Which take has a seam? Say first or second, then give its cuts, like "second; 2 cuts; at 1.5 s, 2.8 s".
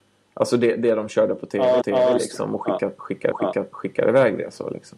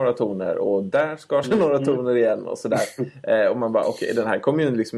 first; 2 cuts; at 1.8 s, 3.3 s